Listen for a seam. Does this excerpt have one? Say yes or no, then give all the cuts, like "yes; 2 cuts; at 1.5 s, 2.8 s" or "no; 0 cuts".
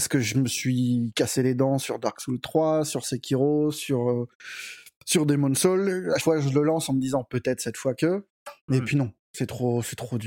yes; 1 cut; at 6.2 s